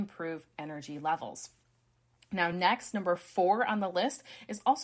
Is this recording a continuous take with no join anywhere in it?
yes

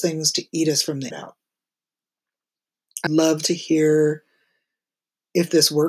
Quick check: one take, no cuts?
no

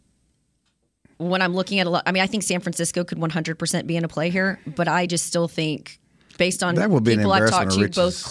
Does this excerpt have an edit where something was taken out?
no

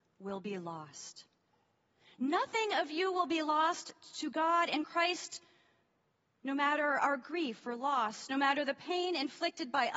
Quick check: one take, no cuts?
yes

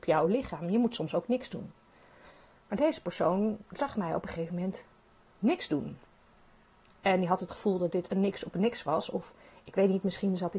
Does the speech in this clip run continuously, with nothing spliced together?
yes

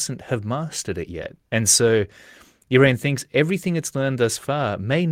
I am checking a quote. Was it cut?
yes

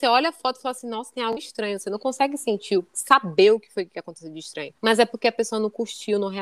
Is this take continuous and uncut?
no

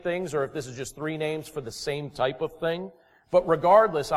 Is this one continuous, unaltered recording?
yes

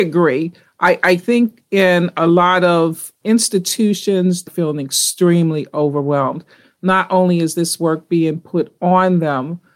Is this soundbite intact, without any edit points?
no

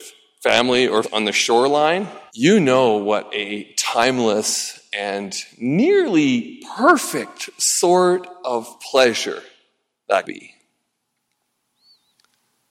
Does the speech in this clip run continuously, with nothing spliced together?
no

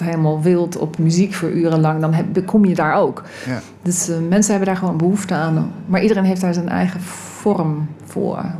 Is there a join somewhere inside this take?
no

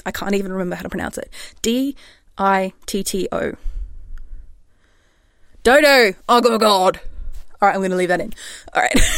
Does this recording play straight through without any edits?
yes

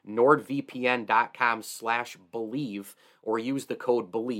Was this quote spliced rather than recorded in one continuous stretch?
no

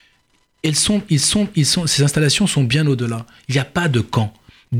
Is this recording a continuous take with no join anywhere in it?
no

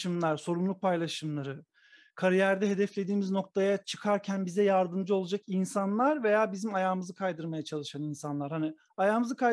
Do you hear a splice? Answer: no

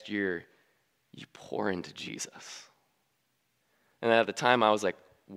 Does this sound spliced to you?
no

